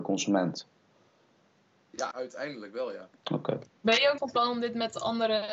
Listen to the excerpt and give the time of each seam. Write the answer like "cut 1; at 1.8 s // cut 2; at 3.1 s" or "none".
cut 1; at 2.1 s // cut 2; at 3.2 s // cut 3; at 4.2 s